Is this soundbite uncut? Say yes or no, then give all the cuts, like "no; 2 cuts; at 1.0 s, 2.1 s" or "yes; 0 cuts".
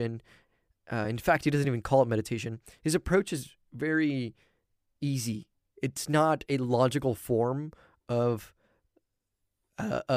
yes; 0 cuts